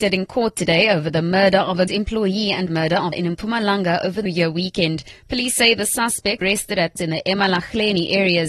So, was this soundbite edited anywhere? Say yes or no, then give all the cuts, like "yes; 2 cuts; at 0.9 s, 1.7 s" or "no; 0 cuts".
yes; 6 cuts; at 1.9 s, 2.7 s, 3.1 s, 4.3 s, 6.4 s, 7.0 s